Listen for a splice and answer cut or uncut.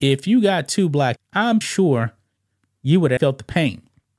cut